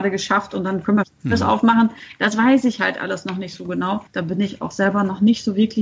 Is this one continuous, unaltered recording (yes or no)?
no